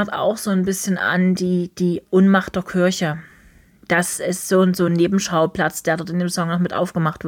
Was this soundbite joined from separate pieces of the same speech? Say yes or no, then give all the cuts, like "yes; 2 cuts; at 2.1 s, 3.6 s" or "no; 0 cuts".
no; 0 cuts